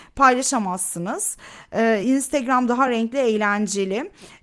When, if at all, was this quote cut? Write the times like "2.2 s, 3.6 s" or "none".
none